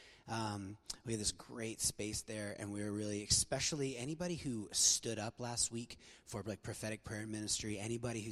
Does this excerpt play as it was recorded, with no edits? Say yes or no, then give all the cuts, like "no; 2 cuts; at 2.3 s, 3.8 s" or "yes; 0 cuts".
yes; 0 cuts